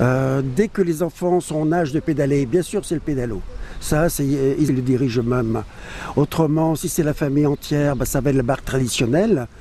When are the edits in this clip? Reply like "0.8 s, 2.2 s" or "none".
4.7 s

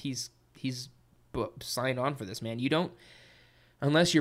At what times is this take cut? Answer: none

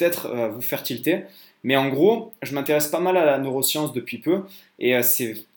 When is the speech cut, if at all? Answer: none

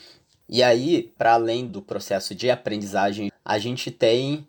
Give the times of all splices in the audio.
1.2 s, 1.7 s, 3.3 s

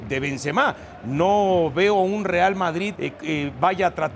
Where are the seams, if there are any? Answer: 2.9 s

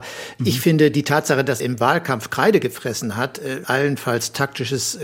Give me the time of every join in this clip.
1.6 s, 3.6 s

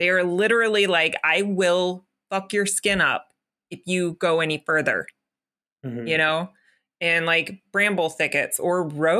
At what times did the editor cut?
none

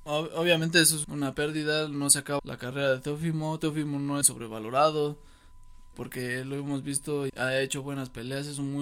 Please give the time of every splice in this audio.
1.0 s, 2.4 s, 4.2 s, 5.9 s, 7.3 s

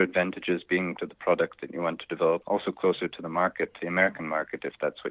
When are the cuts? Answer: 1.0 s, 2.4 s, 3.8 s

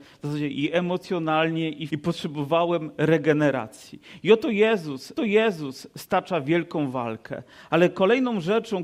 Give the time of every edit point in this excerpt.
1.9 s, 5.2 s

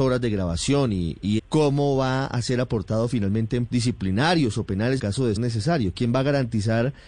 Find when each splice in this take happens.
1.4 s, 3.7 s, 5.0 s, 5.4 s

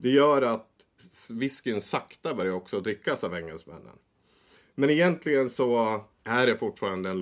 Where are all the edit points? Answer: none

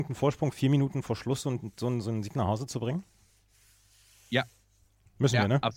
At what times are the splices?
none

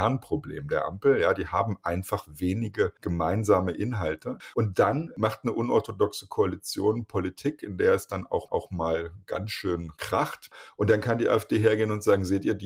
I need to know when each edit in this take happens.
8.5 s

